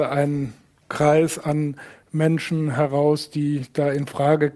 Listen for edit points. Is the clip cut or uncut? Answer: uncut